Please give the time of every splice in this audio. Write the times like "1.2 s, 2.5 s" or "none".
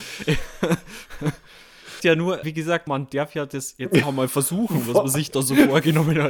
2.0 s, 2.4 s, 2.9 s, 4.0 s